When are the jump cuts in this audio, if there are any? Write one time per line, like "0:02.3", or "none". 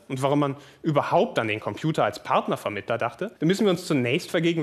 0:03.4